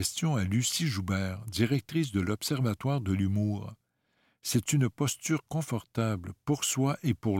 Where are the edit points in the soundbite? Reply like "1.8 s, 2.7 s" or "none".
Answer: none